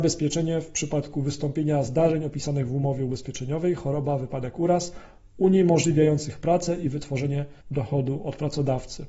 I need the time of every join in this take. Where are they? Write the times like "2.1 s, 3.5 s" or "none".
7.6 s